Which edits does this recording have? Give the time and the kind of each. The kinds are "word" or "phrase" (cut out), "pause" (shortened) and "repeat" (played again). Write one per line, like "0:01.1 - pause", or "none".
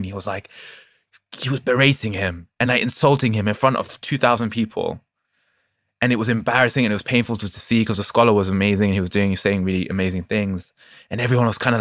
none